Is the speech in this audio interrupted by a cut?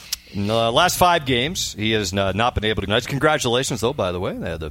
yes; 1 cut; at 2.9 s

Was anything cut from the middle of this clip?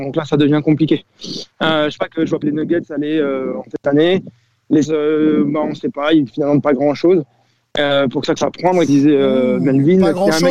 yes; 7 cuts; at 2.0 s, 2.4 s, 3.7 s, 4.8 s, 6.3 s, 8.4 s, 8.9 s

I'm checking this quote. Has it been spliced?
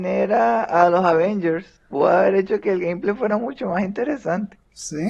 no; 0 cuts

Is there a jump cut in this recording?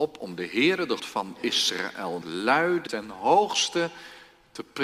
yes; 3 cuts; at 1.0 s, 2.2 s, 2.9 s

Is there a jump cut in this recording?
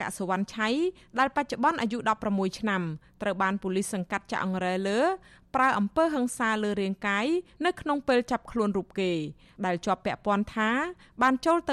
no; 0 cuts

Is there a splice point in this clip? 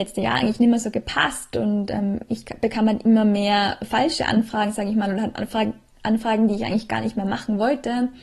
no; 0 cuts

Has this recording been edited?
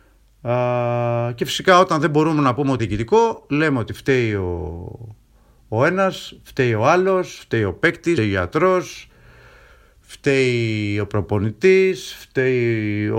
yes; 2 cuts; at 2.8 s, 8.2 s

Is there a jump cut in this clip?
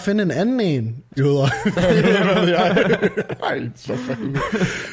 yes; 1 cut; at 1.2 s

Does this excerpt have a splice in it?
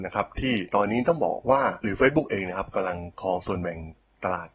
yes; 1 cut; at 1.8 s

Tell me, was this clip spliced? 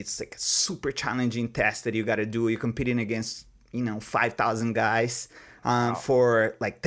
no; 0 cuts

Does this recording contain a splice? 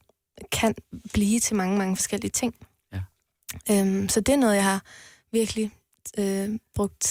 no; 0 cuts

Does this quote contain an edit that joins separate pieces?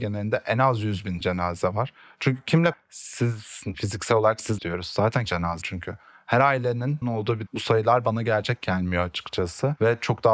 yes; 8 cuts; at 1.2 s, 2.7 s, 3.7 s, 4.6 s, 5.3 s, 5.6 s, 7.0 s, 7.5 s

